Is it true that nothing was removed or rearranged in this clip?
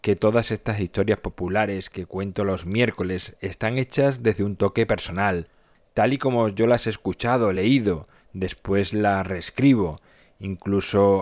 yes; 0 cuts

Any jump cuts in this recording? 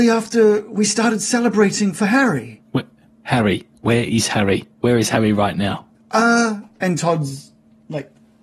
yes; 2 cuts; at 3.7 s, 4.7 s

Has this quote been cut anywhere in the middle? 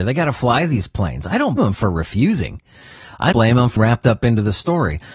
yes; 3 cuts; at 1.6 s, 3.3 s, 3.8 s

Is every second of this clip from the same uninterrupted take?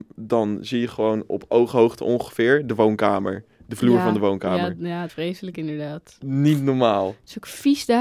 no; 1 cut; at 5.1 s

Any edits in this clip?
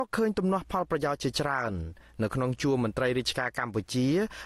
no; 0 cuts

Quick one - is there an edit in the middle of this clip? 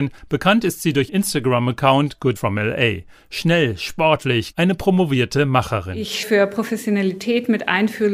yes; 4 cuts; at 1.1 s, 2.4 s, 4.5 s, 6.2 s

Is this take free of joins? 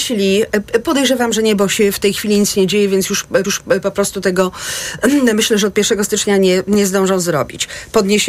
no; 1 cut; at 3.4 s

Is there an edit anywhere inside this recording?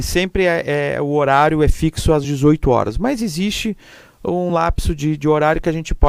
no; 0 cuts

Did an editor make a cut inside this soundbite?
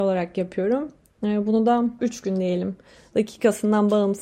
yes; 1 cut; at 2.0 s

